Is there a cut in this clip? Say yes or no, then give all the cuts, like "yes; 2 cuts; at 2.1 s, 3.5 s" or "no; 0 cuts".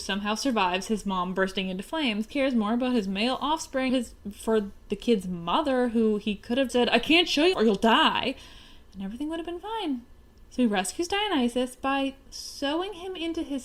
yes; 4 cuts; at 2.3 s, 3.9 s, 6.7 s, 7.5 s